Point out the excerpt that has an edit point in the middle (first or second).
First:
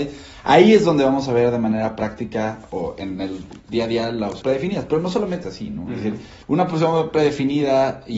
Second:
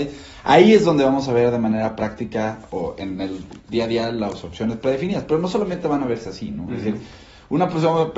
first